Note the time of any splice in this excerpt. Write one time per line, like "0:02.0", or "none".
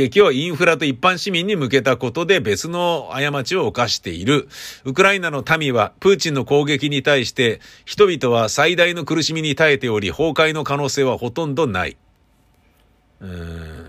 none